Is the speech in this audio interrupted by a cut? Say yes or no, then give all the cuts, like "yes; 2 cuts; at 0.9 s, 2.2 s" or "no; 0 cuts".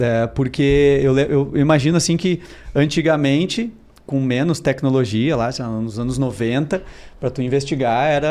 no; 0 cuts